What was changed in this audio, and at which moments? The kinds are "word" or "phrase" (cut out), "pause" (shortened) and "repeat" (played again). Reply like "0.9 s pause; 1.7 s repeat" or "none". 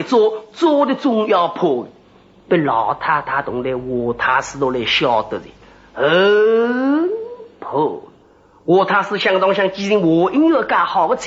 8.2 s pause